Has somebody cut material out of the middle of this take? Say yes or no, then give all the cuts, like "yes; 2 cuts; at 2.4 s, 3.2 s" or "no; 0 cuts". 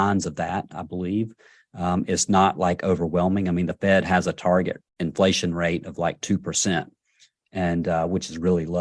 yes; 1 cut; at 4.9 s